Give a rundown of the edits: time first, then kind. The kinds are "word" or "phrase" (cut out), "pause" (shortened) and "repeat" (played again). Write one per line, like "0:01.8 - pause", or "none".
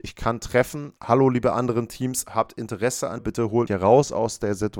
0:01.0 - pause
0:03.2 - word
0:03.7 - word